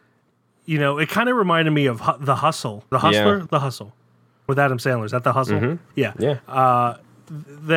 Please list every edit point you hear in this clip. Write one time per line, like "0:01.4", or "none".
0:02.9
0:03.5
0:04.5
0:05.9